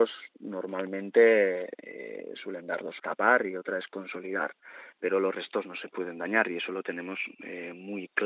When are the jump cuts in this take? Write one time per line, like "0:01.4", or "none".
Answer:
0:03.0